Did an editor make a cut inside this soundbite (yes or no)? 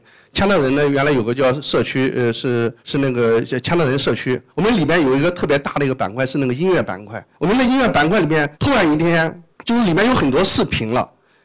yes